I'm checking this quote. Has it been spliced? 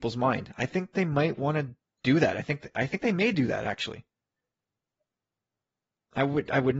no; 0 cuts

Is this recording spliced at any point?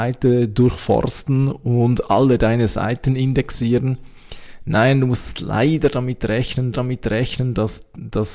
yes; 1 cut; at 6.7 s

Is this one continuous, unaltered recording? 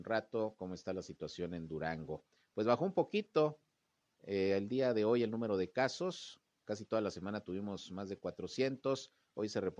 yes; 0 cuts

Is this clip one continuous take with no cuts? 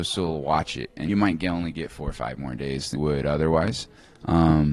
no; 2 cuts; at 1.1 s, 3.0 s

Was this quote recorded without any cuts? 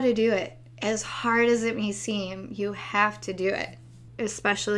yes; 0 cuts

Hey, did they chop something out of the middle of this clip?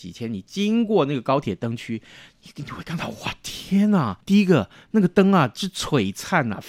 yes; 1 cut; at 4.2 s

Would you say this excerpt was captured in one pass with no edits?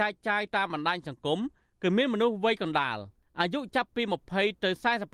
yes; 0 cuts

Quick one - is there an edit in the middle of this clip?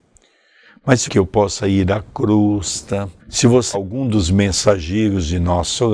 yes; 3 cuts; at 1.1 s, 3.2 s, 3.7 s

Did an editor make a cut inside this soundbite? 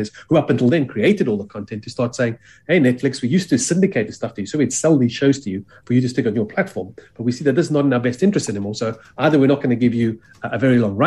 no; 0 cuts

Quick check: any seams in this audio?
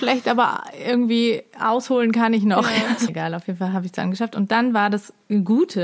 yes; 1 cut; at 3.1 s

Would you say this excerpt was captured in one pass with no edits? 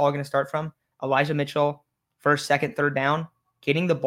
yes; 0 cuts

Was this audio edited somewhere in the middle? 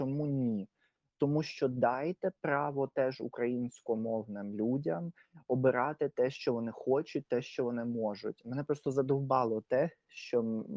no; 0 cuts

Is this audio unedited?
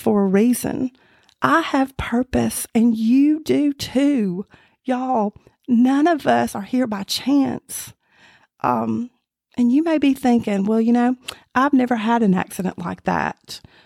yes; 0 cuts

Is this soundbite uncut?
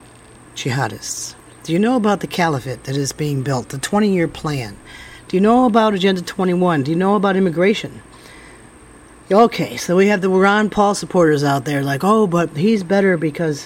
yes; 0 cuts

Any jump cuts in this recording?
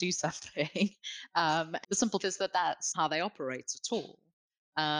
yes; 3 cuts; at 1.8 s, 2.2 s, 2.9 s

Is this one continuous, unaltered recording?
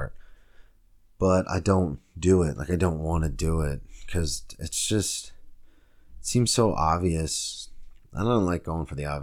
yes; 0 cuts

